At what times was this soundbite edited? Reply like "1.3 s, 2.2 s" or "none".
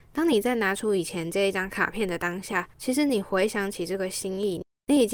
2.7 s